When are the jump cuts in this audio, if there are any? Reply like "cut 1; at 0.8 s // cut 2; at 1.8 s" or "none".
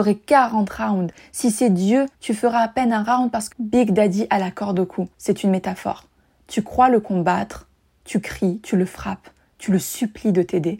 cut 1; at 2.1 s // cut 2; at 3.5 s // cut 3; at 5.1 s

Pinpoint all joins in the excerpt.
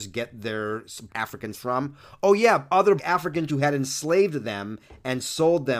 cut 1; at 1.1 s // cut 2; at 1.5 s // cut 3; at 3.0 s // cut 4; at 3.5 s

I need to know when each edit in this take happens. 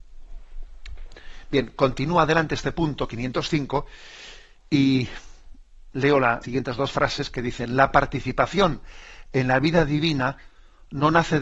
cut 1; at 6.4 s

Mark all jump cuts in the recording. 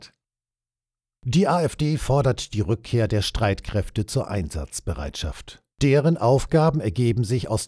cut 1; at 5.7 s

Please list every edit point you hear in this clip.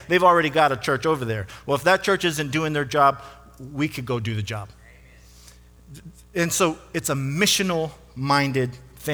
none

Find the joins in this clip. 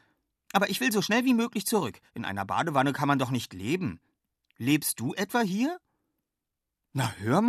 cut 1; at 2.1 s

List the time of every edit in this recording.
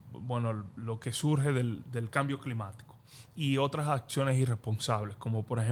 none

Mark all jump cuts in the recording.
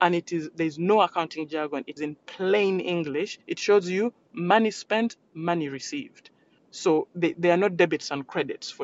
cut 1; at 2.0 s // cut 2; at 3.4 s // cut 3; at 6.6 s // cut 4; at 7.3 s

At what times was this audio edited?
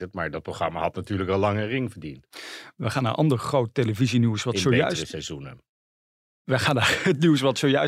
none

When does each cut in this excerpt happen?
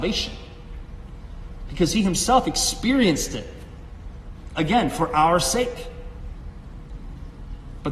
none

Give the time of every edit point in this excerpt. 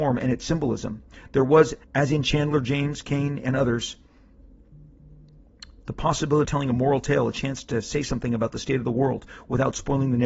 cut 1; at 1.8 s // cut 2; at 6.4 s

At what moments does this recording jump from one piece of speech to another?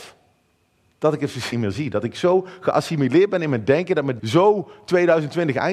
cut 1; at 1.5 s // cut 2; at 4.2 s

